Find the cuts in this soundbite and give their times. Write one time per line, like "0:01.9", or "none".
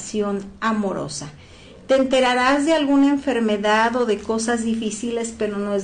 none